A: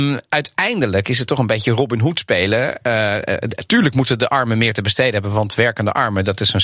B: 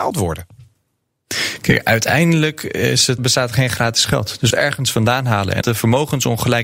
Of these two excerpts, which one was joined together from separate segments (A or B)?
B